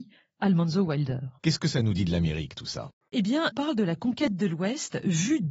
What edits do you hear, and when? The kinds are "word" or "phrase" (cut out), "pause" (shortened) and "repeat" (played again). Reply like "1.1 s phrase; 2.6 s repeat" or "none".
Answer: 3.5 s phrase